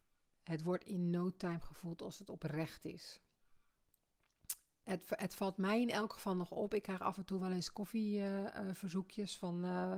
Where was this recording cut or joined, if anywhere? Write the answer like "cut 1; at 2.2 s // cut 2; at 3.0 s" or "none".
none